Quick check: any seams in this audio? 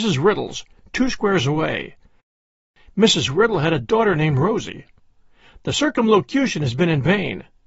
no; 0 cuts

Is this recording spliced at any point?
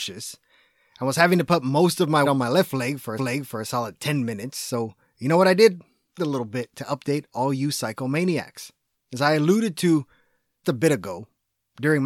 yes; 5 cuts; at 2.2 s, 3.2 s, 6.2 s, 8.9 s, 10.6 s

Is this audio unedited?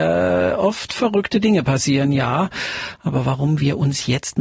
yes; 0 cuts

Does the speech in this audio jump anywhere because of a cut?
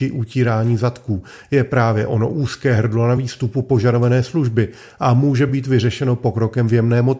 no; 0 cuts

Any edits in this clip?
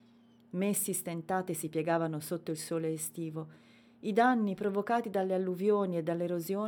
no; 0 cuts

